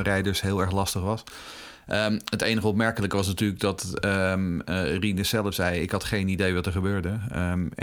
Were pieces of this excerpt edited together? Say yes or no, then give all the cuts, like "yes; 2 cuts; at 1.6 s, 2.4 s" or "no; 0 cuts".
no; 0 cuts